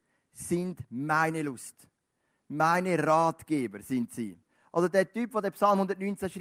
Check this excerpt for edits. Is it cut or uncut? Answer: uncut